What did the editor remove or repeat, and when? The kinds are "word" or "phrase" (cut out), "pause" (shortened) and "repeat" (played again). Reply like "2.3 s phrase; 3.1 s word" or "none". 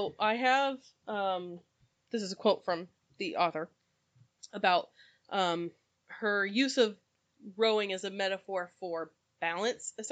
none